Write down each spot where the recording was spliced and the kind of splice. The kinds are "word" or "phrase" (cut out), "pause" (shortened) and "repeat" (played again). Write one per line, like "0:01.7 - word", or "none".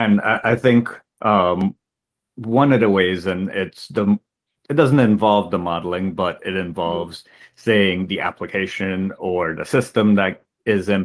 none